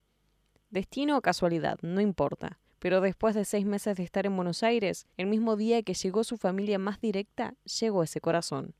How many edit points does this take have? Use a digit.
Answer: 2